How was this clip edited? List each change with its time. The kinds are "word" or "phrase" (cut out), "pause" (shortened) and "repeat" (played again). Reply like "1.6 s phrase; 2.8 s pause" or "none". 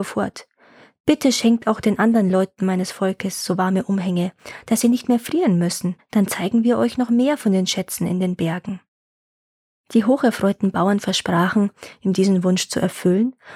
6.0 s pause